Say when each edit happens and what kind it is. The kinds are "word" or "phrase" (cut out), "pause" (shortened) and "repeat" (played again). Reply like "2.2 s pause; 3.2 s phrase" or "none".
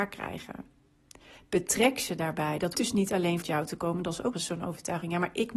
2.7 s word; 3.4 s word; 4.3 s word

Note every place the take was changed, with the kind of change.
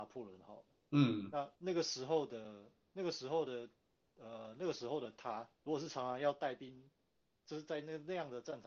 1.6 s pause; 3.8 s pause; 5.5 s pause

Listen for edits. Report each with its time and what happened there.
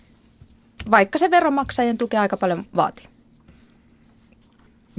2.7 s pause

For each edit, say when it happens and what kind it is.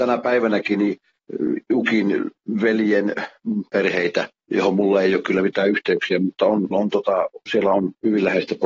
6.7 s word

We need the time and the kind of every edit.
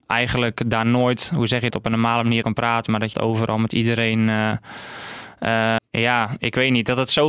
1.7 s word; 2.4 s word; 3.1 s word; 5.8 s word

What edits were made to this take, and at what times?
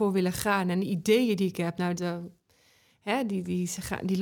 2.0 s word

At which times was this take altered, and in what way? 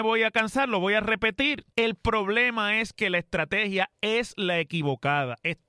1.7 s pause

